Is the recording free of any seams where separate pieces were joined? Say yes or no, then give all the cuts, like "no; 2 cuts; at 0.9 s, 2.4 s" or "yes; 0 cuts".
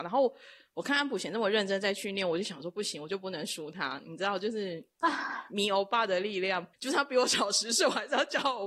no; 1 cut; at 6.7 s